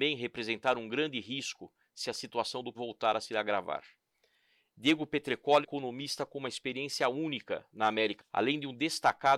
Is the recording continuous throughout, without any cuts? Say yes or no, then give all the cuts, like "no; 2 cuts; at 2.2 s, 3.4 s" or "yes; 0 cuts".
no; 3 cuts; at 2.7 s, 5.6 s, 8.2 s